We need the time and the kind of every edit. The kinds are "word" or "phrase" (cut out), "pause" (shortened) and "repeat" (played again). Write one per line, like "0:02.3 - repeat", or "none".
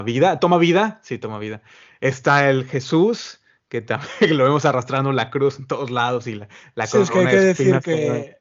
none